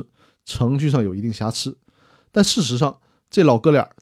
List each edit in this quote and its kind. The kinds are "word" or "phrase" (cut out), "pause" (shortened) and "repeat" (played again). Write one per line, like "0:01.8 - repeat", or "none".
none